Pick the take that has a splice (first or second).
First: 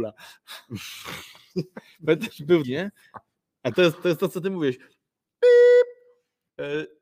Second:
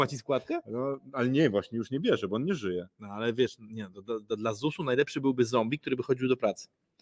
first